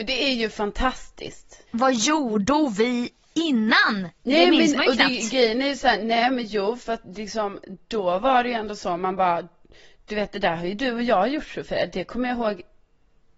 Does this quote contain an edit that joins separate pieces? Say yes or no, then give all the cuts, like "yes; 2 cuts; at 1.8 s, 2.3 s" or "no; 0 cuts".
no; 0 cuts